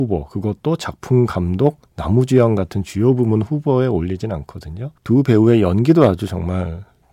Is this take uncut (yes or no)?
no